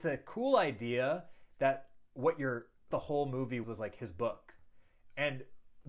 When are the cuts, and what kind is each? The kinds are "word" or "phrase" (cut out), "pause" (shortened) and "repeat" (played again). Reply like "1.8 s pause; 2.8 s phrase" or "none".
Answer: 2.9 s phrase; 3.6 s word